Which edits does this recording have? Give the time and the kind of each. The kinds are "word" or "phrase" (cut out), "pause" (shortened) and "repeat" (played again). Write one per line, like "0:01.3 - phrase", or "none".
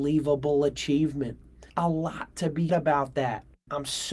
0:01.7 - pause
0:02.7 - word